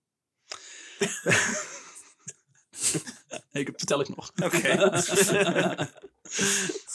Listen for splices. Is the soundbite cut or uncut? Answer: uncut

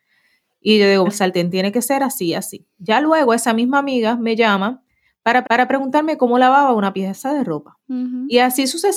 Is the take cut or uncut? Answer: cut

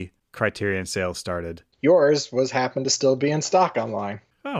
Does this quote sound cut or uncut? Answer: uncut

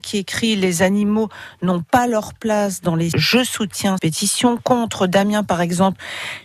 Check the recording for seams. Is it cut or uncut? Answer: cut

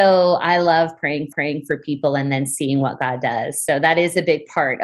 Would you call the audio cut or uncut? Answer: cut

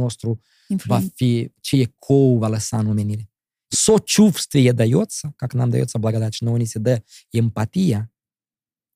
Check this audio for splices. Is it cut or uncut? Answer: cut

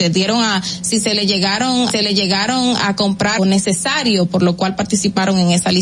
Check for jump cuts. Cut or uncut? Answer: cut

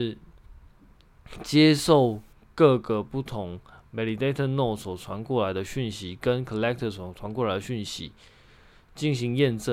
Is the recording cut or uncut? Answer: uncut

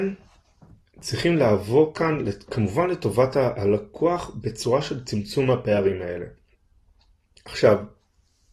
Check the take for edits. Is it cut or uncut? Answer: uncut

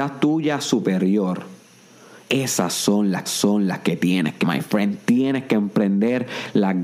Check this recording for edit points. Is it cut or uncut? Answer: cut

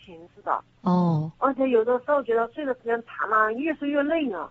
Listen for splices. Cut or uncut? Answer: cut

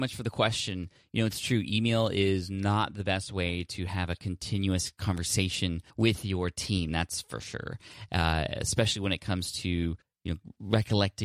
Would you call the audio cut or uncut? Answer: cut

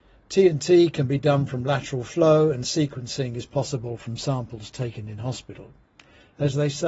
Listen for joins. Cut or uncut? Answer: uncut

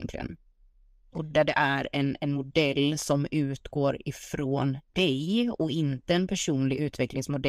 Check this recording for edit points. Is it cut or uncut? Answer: cut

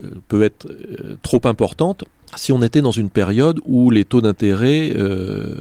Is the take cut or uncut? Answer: uncut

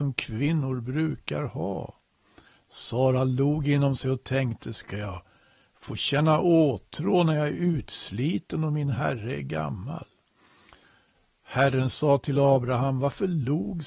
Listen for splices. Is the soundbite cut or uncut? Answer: uncut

